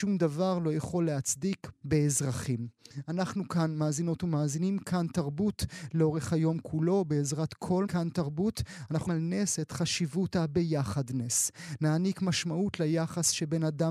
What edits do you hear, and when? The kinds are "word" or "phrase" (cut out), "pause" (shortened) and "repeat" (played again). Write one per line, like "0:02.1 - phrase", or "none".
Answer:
0:01.8 - word
0:07.9 - word
0:09.1 - word